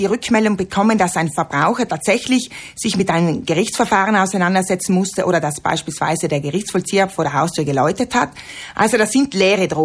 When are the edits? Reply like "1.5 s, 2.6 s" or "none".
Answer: none